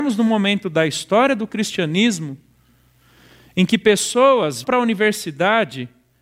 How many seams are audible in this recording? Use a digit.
1